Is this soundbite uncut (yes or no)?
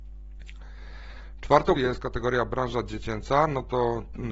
no